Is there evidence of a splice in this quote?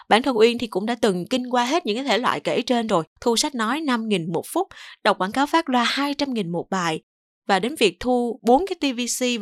yes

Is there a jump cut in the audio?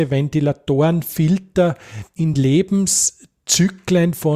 no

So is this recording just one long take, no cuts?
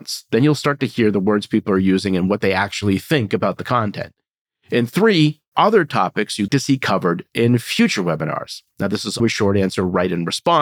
no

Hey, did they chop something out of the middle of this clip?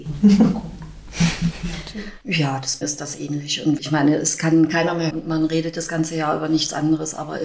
yes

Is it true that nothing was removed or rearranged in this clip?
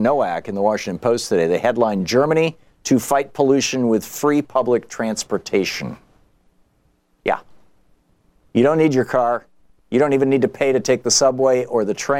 yes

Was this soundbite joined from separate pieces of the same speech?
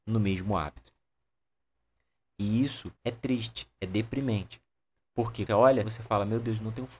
yes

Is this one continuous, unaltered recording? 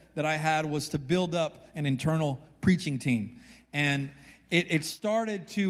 yes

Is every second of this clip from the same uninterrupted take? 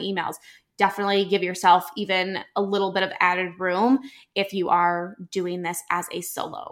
yes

